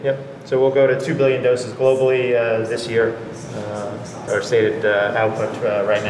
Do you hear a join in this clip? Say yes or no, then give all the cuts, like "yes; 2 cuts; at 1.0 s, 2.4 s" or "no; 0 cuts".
yes; 1 cut; at 4.3 s